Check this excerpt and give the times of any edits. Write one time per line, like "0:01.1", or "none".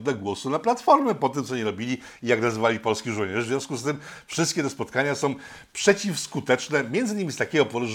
none